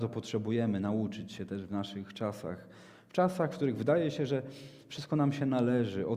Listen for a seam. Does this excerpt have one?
no; 0 cuts

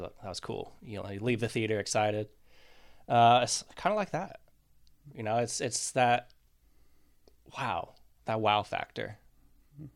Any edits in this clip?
no; 0 cuts

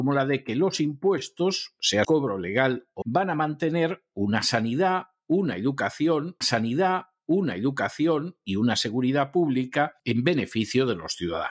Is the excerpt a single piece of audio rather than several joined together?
no; 4 cuts; at 2.0 s, 3.0 s, 6.4 s, 10.0 s

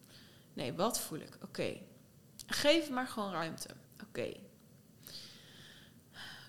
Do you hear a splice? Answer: yes; 1 cut; at 3.8 s

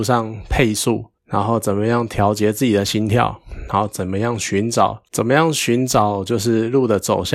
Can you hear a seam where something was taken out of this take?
yes; 2 cuts; at 1.2 s, 5.1 s

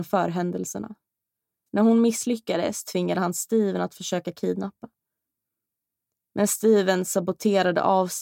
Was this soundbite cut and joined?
no; 0 cuts

